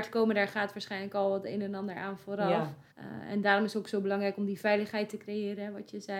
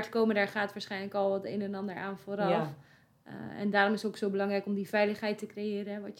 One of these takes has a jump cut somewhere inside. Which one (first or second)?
first